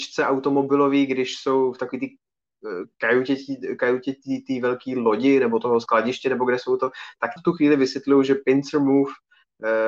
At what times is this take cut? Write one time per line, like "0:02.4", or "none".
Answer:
0:07.4